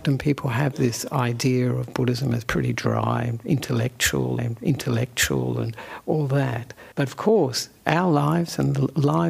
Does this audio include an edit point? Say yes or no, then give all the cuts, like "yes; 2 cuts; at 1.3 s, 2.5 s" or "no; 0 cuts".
yes; 3 cuts; at 2.4 s, 4.4 s, 6.9 s